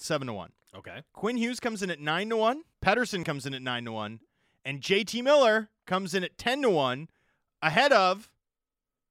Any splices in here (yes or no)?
yes